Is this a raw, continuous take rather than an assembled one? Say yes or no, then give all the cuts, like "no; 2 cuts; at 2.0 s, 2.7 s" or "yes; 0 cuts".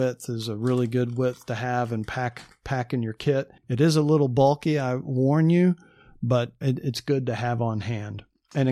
no; 2 cuts; at 3.6 s, 6.6 s